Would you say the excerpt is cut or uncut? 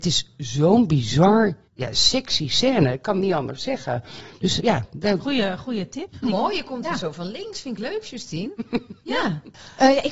cut